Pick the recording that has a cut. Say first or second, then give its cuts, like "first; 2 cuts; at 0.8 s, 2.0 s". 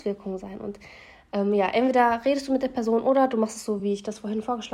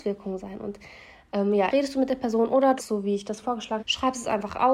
second; 4 cuts; at 1.7 s, 2.8 s, 3.4 s, 3.8 s